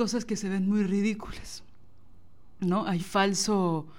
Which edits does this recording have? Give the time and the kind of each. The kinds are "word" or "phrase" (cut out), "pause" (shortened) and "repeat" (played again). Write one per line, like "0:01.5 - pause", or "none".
0:03.0 - word